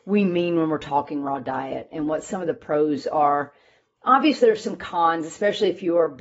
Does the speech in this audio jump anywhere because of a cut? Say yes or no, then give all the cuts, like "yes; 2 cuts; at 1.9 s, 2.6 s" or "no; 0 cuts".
no; 0 cuts